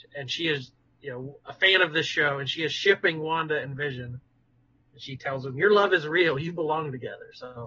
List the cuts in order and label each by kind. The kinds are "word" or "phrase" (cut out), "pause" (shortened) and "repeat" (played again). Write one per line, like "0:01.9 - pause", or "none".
none